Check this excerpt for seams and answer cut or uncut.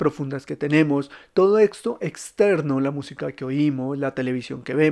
uncut